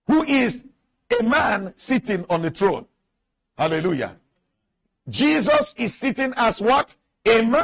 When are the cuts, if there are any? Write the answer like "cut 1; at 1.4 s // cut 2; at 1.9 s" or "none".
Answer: none